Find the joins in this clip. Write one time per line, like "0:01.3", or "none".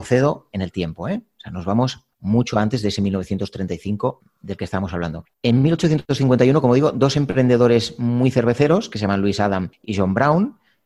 0:02.1
0:05.3